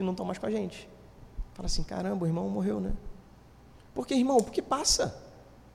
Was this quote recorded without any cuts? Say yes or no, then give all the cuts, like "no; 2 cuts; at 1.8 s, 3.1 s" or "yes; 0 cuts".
yes; 0 cuts